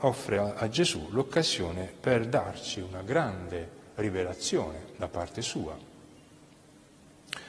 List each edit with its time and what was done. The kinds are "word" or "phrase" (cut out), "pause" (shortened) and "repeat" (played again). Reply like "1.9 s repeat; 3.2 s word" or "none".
none